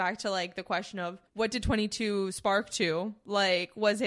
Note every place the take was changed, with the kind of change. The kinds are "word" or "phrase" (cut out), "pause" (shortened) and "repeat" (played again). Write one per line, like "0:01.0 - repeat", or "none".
0:01.3 - pause